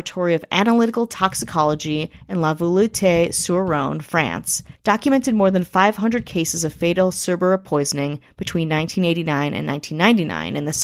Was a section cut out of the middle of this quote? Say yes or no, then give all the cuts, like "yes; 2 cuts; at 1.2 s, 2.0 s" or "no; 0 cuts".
no; 0 cuts